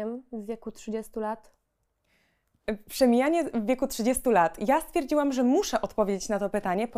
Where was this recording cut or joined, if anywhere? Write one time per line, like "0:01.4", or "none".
none

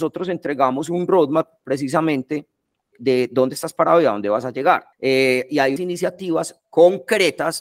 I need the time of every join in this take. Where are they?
0:02.9
0:04.9
0:05.8

